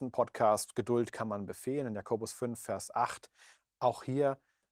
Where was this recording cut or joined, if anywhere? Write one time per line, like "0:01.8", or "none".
none